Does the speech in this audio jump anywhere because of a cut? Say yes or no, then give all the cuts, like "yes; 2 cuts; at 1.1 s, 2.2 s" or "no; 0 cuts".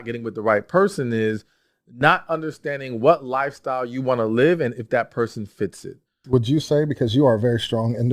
no; 0 cuts